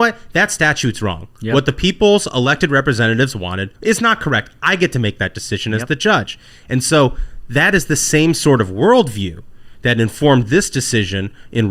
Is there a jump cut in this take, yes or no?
yes